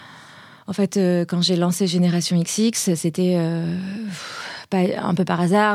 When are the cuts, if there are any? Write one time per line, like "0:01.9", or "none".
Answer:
none